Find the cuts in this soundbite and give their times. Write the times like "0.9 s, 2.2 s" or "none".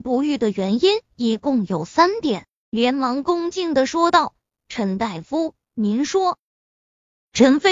1.0 s, 6.5 s